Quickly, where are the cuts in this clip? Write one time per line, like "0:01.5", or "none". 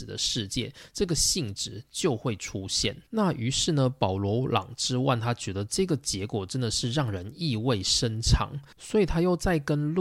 0:03.1